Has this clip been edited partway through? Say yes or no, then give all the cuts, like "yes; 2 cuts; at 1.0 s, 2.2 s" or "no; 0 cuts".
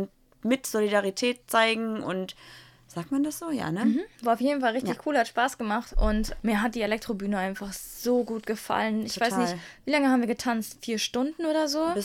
no; 0 cuts